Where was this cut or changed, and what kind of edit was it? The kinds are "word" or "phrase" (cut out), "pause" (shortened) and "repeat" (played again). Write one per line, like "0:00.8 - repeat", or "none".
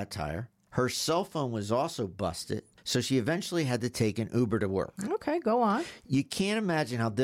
none